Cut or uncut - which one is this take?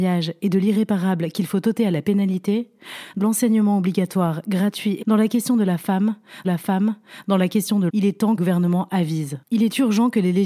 cut